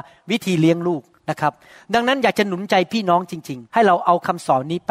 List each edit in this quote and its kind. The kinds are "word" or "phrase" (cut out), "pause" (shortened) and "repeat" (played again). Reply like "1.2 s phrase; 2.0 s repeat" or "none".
3.7 s word